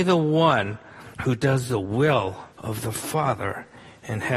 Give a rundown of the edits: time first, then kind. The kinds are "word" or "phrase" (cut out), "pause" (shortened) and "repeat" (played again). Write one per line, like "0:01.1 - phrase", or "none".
0:01.1 - pause
0:02.5 - pause